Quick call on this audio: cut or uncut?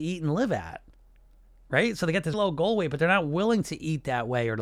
cut